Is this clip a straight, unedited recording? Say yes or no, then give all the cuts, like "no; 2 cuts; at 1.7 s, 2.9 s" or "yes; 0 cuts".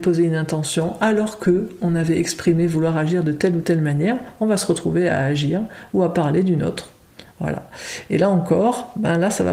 yes; 0 cuts